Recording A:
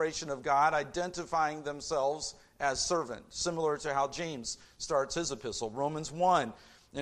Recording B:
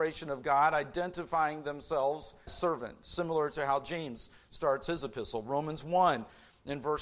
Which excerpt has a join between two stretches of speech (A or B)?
B